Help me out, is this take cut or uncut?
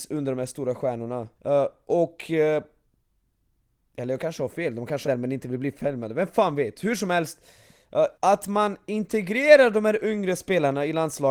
cut